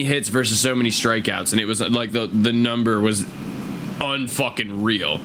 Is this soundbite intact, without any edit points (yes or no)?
yes